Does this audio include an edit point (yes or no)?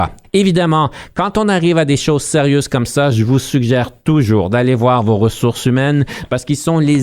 no